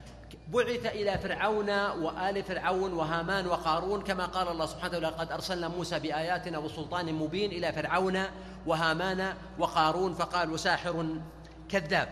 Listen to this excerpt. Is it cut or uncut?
uncut